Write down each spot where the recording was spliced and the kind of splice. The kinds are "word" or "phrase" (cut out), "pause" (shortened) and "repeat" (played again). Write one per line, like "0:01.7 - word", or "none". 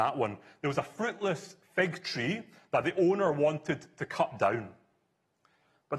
none